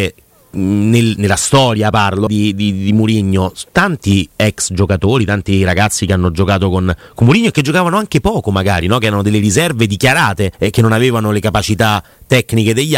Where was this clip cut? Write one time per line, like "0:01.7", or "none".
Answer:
0:02.3
0:10.5